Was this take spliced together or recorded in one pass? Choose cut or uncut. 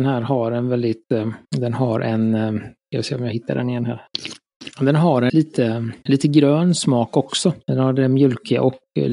cut